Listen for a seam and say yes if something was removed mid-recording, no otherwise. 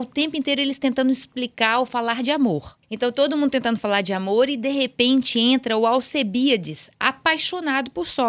yes